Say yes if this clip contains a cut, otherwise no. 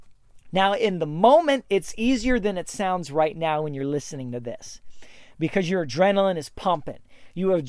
no